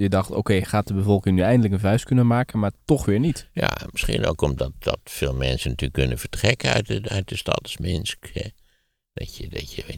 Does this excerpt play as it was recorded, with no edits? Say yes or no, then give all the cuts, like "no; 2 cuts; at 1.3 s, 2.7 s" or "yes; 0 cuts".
yes; 0 cuts